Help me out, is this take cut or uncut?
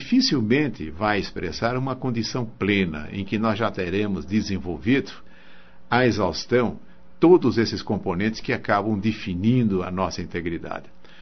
uncut